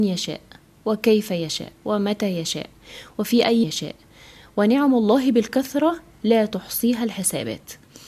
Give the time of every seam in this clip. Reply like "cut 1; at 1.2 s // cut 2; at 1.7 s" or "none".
cut 1; at 1.8 s // cut 2; at 3.6 s